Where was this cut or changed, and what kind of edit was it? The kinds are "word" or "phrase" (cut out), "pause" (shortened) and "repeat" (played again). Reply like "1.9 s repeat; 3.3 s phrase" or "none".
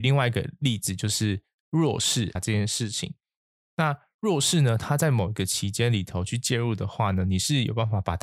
2.4 s word